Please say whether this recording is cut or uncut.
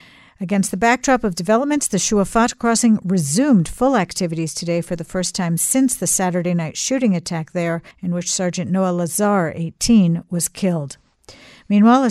cut